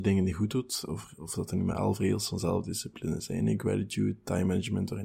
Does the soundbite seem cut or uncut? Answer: uncut